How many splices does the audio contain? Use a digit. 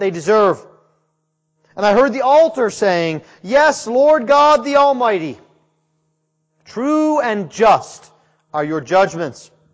0